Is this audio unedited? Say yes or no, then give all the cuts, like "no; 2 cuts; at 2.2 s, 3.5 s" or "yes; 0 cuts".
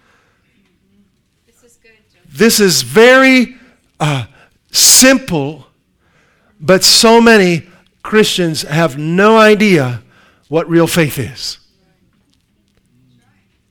yes; 0 cuts